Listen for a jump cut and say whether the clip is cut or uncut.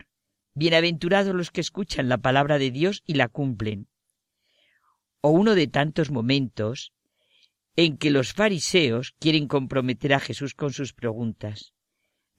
uncut